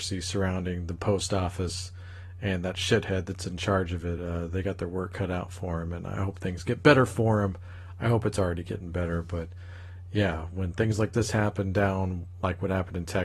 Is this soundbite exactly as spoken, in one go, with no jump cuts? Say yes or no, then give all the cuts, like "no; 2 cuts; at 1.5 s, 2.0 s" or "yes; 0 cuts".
yes; 0 cuts